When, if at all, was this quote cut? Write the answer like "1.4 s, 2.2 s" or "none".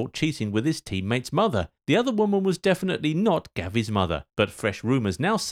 1.8 s, 4.3 s